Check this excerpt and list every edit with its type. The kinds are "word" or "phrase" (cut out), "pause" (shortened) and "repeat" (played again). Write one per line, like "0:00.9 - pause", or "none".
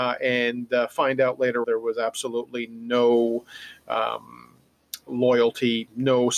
0:01.6 - phrase